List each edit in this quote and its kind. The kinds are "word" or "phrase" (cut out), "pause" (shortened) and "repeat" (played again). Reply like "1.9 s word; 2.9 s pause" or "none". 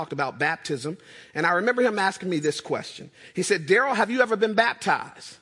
none